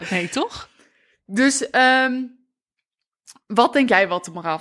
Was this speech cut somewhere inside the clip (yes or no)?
no